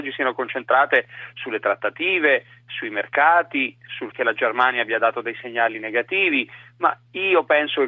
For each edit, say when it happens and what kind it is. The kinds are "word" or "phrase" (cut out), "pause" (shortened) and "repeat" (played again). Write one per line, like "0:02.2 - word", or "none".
0:04.1 - word